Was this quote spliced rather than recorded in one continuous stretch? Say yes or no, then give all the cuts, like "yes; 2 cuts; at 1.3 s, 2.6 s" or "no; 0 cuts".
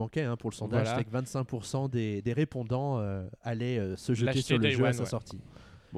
no; 0 cuts